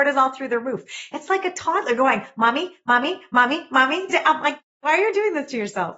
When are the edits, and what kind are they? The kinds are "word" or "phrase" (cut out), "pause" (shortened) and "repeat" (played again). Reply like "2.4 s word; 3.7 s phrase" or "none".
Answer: 4.1 s phrase